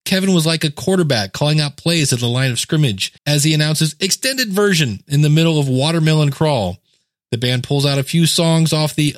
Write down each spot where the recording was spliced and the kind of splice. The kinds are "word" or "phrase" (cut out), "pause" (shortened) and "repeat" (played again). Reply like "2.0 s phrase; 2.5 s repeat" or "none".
3.2 s pause